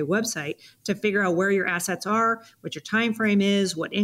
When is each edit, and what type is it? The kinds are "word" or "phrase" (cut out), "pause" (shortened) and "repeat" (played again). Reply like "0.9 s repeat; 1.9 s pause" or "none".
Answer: none